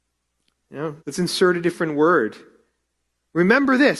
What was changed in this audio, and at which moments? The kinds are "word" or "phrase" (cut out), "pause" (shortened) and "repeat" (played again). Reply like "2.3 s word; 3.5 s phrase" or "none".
1.0 s pause